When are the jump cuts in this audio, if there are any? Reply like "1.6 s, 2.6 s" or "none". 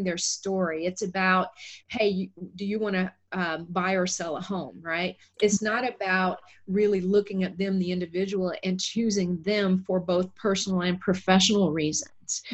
1.8 s